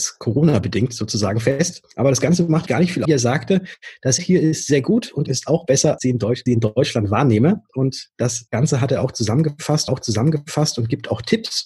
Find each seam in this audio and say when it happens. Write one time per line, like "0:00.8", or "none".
0:01.9
0:02.7
0:03.1
0:04.2
0:05.3
0:06.0
0:06.5
0:09.9